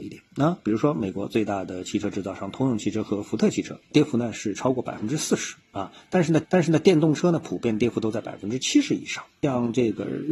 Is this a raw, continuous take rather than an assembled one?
no; 1 cut; at 6.4 s

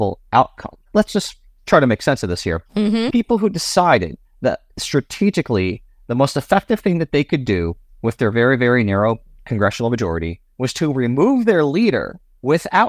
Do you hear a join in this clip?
yes; 1 cut; at 3.1 s

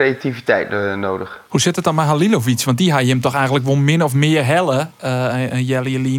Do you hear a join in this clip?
yes; 1 cut; at 1.5 s

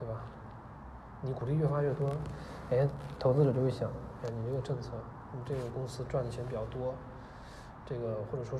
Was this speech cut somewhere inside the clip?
no; 0 cuts

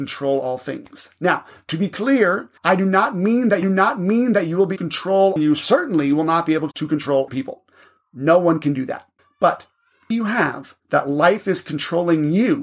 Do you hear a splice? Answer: yes; 9 cuts; at 2.6 s, 3.6 s, 4.8 s, 5.4 s, 6.7 s, 7.3 s, 9.2 s, 10.1 s, 10.8 s

